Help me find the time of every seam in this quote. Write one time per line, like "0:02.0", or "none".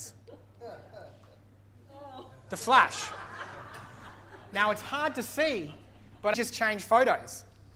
0:06.3